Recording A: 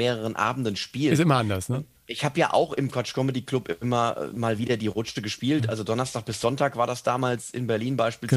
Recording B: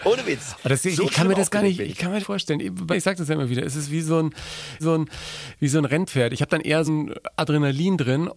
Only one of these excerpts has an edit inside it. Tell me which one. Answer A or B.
B